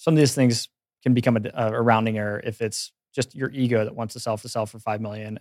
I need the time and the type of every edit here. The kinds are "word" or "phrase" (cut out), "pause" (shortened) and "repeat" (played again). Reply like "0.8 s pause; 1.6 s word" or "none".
4.4 s repeat